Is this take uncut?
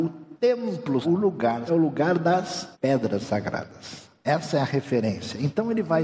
no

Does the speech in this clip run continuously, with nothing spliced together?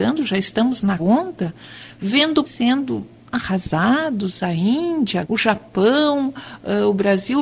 no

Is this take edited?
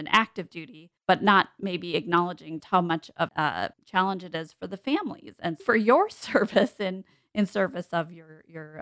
yes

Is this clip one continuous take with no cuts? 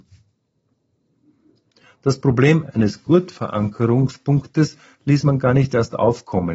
yes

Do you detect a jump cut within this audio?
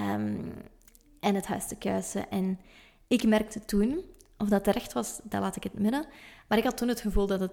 no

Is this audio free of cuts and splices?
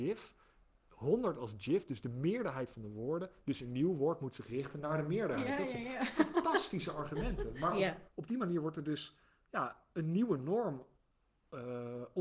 yes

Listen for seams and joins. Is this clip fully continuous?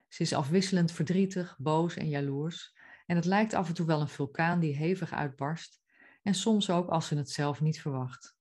yes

